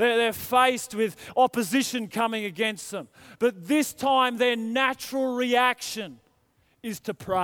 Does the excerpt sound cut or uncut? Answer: uncut